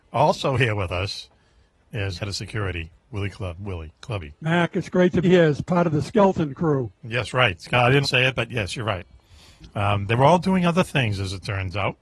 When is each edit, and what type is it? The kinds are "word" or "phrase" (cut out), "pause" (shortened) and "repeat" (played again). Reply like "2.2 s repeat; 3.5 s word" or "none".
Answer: 2.1 s word; 4.0 s pause; 5.2 s word; 8.0 s word